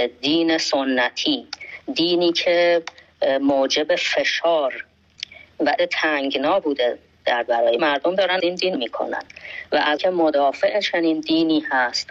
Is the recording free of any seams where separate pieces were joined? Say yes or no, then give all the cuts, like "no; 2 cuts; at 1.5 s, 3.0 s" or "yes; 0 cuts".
no; 6 cuts; at 5.8 s, 7.5 s, 7.8 s, 8.4 s, 8.8 s, 10.0 s